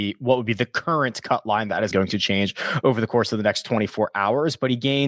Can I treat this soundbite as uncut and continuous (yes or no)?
no